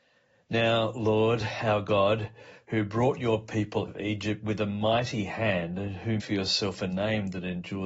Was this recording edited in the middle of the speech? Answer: yes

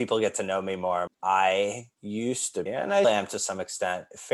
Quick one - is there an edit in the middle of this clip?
yes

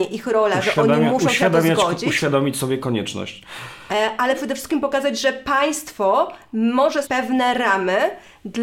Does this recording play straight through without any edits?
no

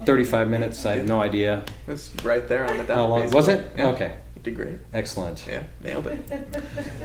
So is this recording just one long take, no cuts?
yes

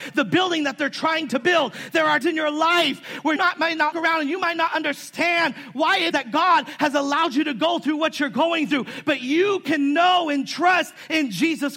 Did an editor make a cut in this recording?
yes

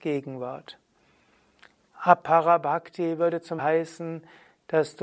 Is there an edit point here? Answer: yes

